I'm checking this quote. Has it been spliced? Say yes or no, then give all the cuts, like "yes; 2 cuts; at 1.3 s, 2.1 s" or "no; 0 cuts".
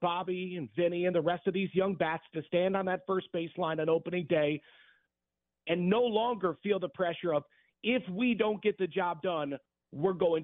no; 0 cuts